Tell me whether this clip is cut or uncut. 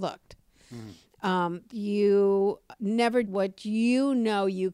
cut